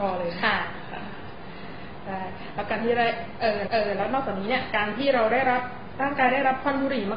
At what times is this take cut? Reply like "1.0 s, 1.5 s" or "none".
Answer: 3.7 s